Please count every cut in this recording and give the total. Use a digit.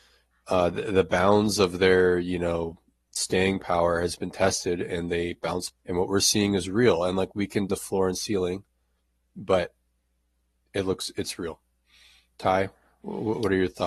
2